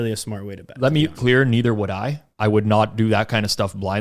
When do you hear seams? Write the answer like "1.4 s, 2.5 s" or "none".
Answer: 1.1 s, 2.3 s